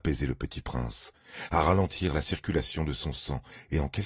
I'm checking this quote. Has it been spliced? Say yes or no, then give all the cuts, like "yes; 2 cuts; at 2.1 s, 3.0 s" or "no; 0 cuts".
no; 0 cuts